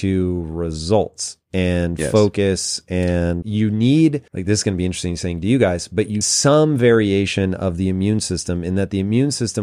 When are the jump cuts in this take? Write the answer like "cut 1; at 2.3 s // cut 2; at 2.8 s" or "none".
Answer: cut 1; at 3.4 s // cut 2; at 4.3 s // cut 3; at 6.2 s